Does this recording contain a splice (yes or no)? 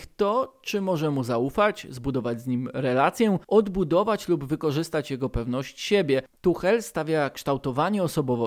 yes